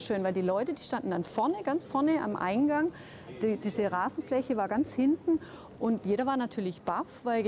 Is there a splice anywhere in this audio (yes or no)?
no